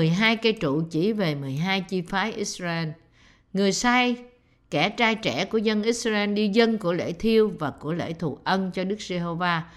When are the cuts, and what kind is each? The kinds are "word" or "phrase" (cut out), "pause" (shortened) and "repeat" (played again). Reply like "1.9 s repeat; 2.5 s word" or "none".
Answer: none